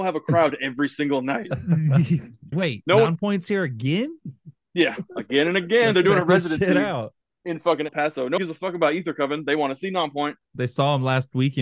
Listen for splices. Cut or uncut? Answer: cut